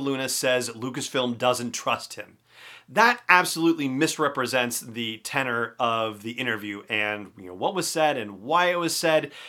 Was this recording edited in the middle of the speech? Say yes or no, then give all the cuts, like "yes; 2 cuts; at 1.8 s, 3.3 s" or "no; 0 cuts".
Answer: no; 0 cuts